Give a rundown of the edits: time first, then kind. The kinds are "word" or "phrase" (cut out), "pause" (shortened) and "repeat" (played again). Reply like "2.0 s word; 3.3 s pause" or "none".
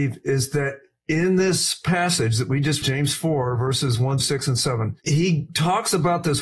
2.8 s word; 4.2 s word